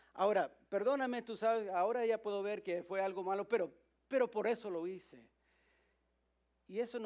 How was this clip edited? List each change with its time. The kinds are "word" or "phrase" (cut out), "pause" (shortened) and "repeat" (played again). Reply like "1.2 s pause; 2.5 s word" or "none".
none